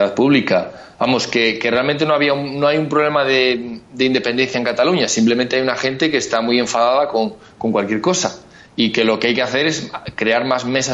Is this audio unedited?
yes; 0 cuts

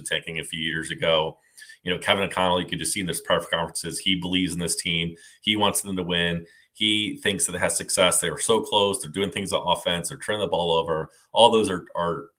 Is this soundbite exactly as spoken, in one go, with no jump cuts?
yes; 0 cuts

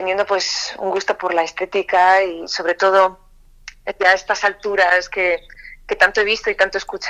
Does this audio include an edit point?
no; 0 cuts

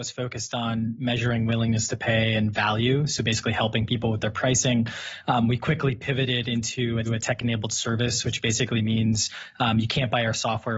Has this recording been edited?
yes; 1 cut; at 7.0 s

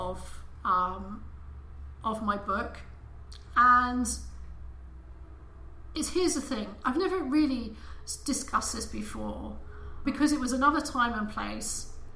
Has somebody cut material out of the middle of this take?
yes; 1 cut; at 10.0 s

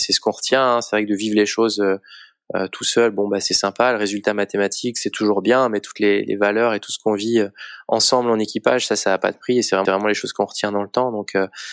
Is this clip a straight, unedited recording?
no; 1 cut; at 9.8 s

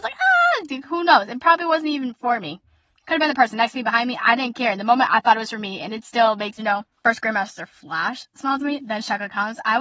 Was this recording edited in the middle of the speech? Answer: yes; 2 cuts; at 6.6 s, 6.9 s

